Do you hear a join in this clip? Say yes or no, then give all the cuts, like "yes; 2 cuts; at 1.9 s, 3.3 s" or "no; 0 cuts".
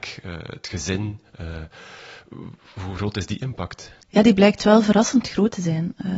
yes; 1 cut; at 4.0 s